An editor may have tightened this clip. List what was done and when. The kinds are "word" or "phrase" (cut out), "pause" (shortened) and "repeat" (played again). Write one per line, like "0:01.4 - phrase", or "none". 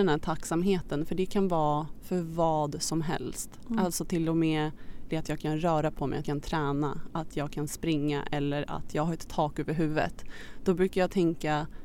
0:05.1 - phrase
0:06.2 - word